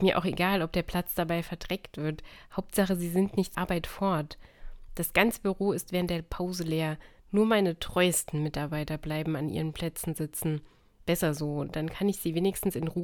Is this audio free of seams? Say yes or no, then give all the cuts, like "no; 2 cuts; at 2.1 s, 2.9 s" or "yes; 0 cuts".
no; 1 cut; at 3.5 s